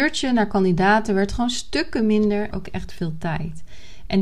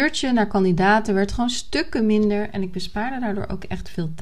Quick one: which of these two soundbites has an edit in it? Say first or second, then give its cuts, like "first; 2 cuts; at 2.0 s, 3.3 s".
first; 1 cut; at 2.5 s